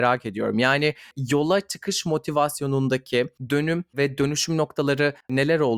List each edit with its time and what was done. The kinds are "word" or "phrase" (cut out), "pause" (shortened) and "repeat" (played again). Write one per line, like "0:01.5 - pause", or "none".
none